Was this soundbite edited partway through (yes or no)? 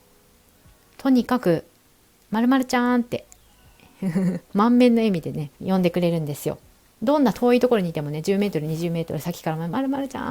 yes